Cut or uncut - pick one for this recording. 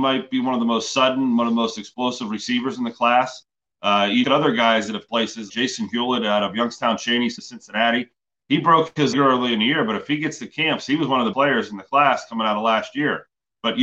cut